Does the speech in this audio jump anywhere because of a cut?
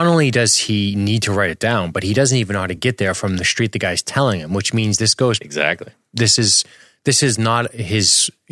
no; 0 cuts

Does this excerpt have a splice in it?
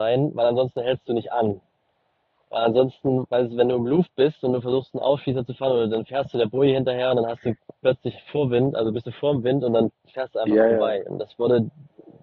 no; 0 cuts

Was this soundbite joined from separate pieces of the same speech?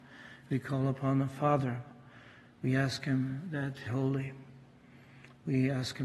yes; 1 cut; at 3.8 s

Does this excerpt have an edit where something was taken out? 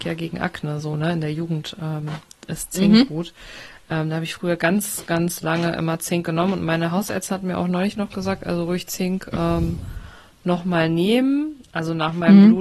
no; 0 cuts

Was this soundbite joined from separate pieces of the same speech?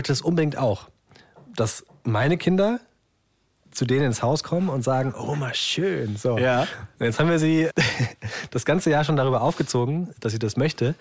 no; 0 cuts

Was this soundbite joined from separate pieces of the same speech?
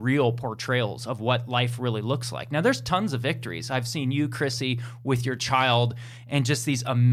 no; 0 cuts

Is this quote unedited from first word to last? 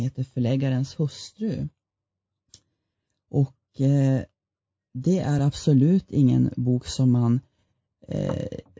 yes; 0 cuts

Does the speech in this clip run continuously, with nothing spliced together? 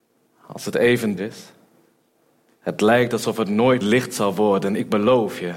no; 2 cuts; at 1.2 s, 3.8 s

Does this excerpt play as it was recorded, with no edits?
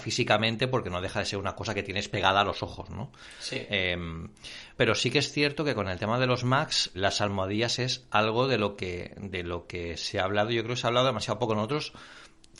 no; 2 cuts; at 4.8 s, 6.9 s

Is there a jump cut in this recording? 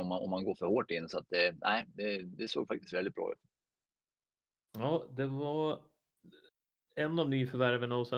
no; 0 cuts

